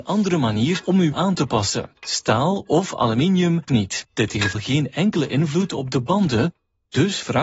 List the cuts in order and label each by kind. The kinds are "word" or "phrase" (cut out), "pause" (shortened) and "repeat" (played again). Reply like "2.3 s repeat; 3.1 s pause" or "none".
1.1 s word; 3.7 s phrase; 4.5 s word